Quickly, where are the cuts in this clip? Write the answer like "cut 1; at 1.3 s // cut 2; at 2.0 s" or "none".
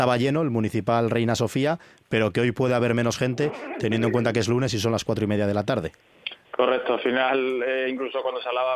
none